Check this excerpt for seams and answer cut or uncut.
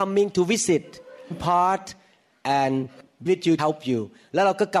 cut